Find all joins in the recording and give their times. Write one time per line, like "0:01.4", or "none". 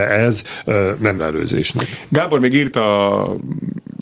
0:01.2
0:02.7